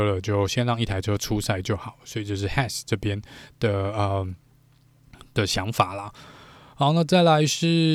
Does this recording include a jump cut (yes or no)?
no